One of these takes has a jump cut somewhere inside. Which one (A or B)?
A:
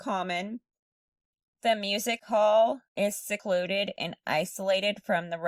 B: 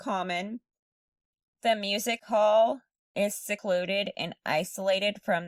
A